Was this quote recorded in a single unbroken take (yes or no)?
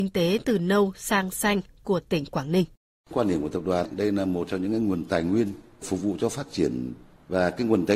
yes